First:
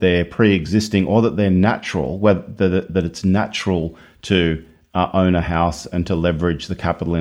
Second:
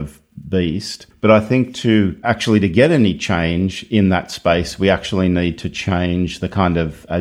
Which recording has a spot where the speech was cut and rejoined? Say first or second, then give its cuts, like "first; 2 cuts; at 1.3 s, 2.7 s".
second; 1 cut; at 1.1 s